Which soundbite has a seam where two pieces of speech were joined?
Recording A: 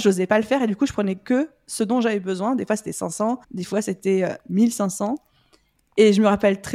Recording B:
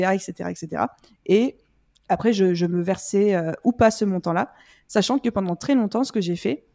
A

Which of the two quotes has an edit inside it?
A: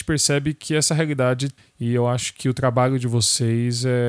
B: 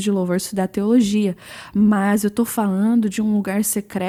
A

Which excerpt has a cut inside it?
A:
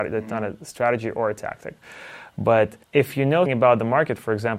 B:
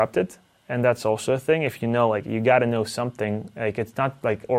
A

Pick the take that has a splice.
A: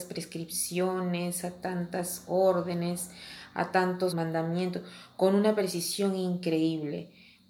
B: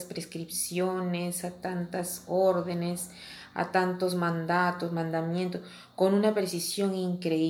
A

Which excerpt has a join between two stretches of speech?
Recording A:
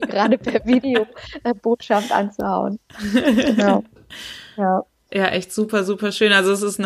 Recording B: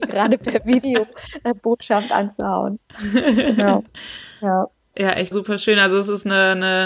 B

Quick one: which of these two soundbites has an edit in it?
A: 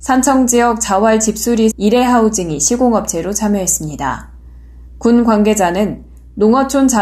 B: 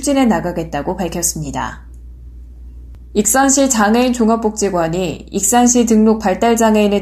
A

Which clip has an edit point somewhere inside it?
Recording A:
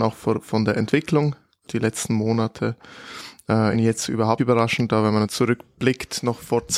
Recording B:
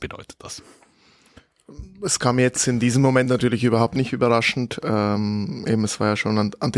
A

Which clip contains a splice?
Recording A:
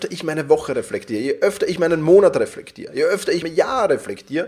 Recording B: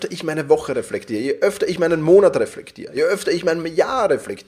A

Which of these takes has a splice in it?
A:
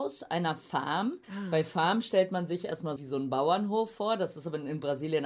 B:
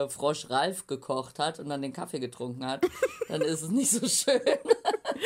A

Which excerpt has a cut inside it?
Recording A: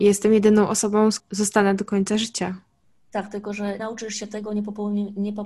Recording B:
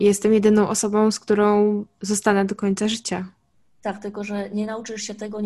A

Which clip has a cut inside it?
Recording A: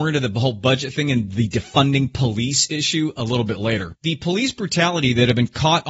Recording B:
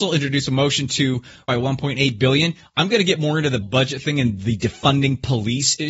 B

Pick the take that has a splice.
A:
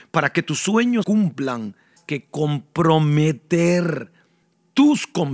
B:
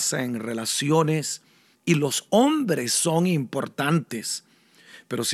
A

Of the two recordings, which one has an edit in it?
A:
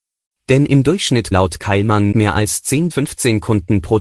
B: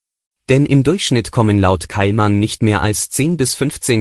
A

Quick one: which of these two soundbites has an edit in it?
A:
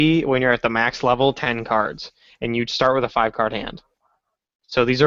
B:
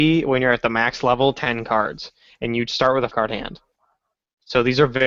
B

